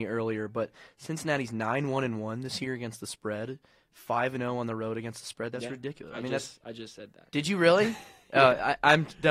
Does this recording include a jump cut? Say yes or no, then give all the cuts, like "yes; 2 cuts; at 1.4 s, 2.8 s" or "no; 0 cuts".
no; 0 cuts